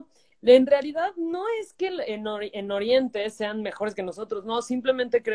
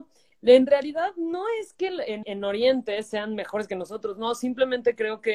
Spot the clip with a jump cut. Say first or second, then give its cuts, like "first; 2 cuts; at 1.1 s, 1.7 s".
second; 1 cut; at 2.2 s